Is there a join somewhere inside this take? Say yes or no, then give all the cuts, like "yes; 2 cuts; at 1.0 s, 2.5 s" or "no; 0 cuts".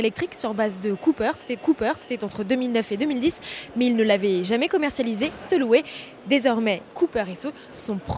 yes; 3 cuts; at 1.6 s, 5.5 s, 6.9 s